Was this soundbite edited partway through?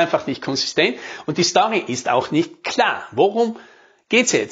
no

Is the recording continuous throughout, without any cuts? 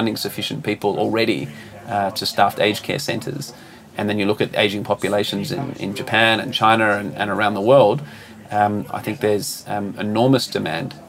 yes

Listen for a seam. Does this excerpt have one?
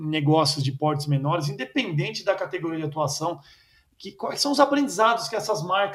no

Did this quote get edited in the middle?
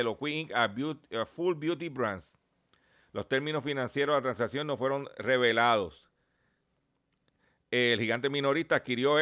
no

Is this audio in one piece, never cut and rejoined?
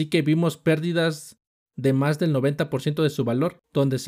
yes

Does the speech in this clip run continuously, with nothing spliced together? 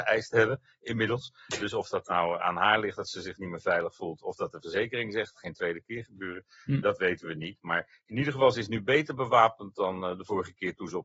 no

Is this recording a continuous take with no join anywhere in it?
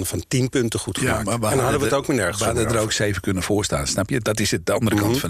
yes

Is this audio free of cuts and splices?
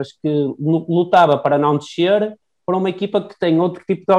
yes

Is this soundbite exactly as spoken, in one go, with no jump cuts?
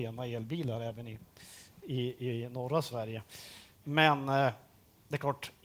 no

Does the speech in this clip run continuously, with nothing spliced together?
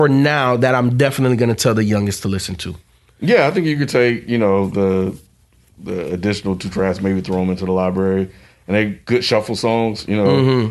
yes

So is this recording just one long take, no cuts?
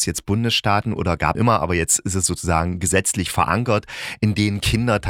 no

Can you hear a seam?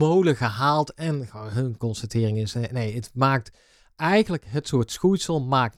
no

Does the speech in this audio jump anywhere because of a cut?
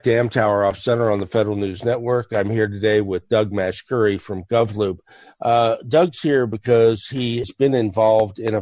no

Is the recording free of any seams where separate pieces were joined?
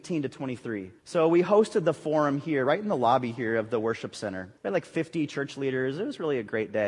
no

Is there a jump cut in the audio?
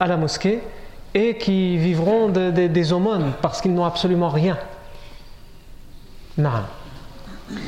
no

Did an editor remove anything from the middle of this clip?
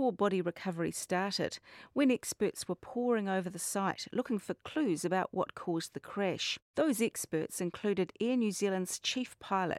yes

